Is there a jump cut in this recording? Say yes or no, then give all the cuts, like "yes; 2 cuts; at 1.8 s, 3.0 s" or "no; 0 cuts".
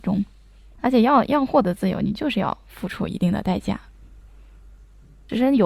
no; 0 cuts